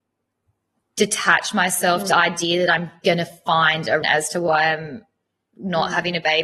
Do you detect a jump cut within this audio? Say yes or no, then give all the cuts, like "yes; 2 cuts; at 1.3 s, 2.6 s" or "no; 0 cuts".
yes; 2 cuts; at 2.1 s, 4.0 s